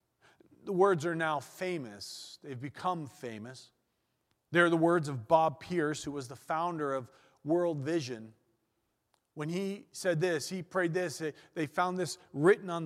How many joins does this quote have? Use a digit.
0